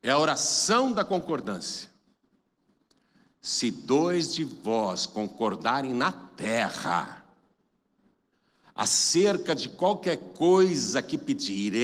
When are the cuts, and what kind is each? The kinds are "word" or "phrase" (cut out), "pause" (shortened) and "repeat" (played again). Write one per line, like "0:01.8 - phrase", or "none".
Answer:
none